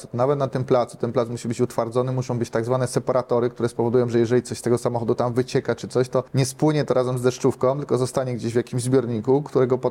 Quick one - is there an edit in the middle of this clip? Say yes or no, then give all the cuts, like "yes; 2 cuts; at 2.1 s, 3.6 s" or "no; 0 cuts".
yes; 1 cut; at 6.3 s